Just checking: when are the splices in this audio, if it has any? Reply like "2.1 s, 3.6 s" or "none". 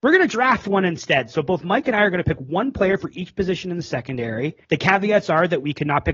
4.6 s